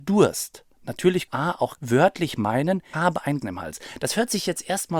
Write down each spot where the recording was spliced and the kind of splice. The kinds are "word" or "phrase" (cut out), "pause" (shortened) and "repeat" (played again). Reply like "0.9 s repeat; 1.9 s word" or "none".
1.3 s word; 1.8 s word; 2.9 s word; 3.4 s word